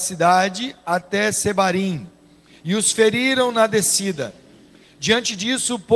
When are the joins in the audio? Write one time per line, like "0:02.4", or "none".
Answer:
none